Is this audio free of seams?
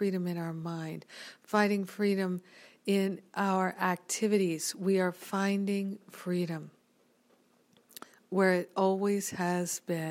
yes; 0 cuts

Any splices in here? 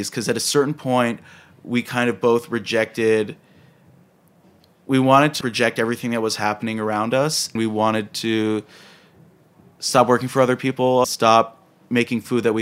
yes; 3 cuts; at 5.4 s, 7.6 s, 11.0 s

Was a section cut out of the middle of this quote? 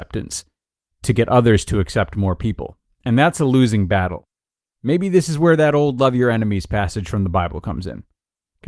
no; 0 cuts

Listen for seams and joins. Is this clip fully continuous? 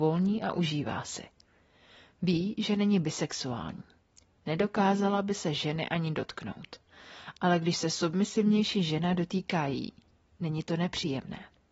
yes; 0 cuts

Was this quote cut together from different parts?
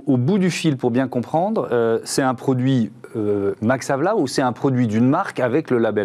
no; 0 cuts

